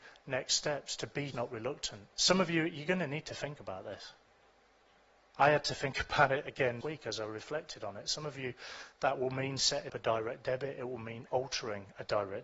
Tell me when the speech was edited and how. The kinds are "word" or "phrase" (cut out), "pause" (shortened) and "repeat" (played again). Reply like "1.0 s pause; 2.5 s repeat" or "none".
1.3 s word; 2.1 s pause; 6.8 s word; 9.9 s word